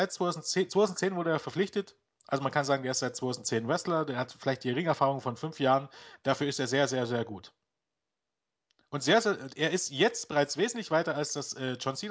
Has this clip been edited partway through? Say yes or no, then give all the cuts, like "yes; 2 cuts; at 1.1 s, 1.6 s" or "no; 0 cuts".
no; 0 cuts